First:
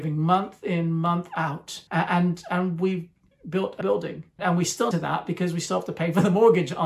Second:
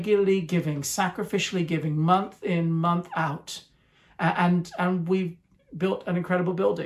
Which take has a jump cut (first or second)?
first